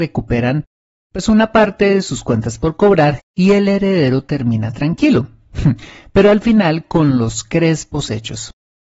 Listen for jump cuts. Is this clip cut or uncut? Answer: uncut